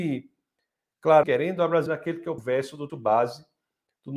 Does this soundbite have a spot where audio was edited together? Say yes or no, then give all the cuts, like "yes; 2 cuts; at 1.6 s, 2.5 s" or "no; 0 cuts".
yes; 4 cuts; at 1.2 s, 1.9 s, 2.4 s, 2.9 s